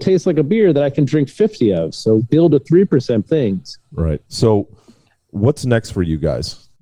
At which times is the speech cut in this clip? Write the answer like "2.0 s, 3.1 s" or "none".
2.2 s, 3.3 s, 4.2 s